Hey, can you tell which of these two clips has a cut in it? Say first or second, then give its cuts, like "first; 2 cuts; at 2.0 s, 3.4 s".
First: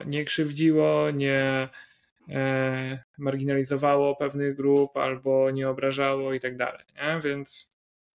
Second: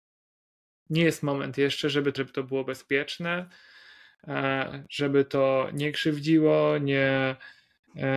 second; 1 cut; at 2.2 s